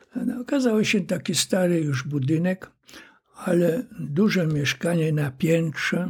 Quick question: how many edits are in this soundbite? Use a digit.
0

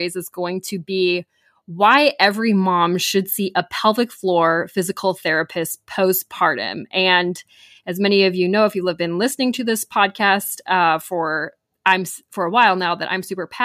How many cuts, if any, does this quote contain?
0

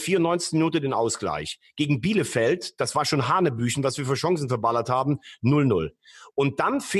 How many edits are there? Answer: 0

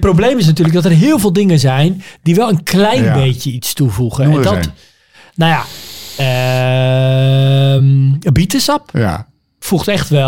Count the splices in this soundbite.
0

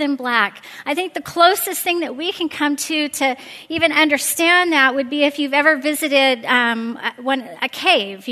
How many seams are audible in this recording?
0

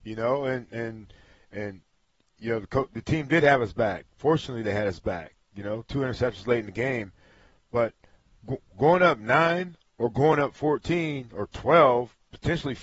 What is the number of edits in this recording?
0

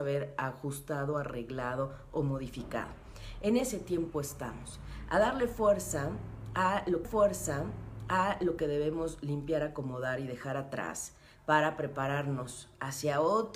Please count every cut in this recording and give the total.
1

